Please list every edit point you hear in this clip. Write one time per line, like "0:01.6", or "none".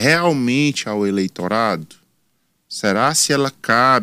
none